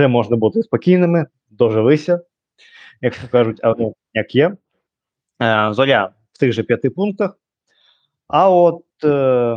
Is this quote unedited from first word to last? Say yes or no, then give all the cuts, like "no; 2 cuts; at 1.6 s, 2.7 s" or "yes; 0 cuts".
yes; 0 cuts